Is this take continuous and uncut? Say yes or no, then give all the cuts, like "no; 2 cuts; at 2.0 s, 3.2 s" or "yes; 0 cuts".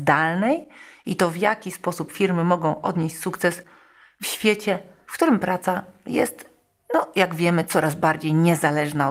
yes; 0 cuts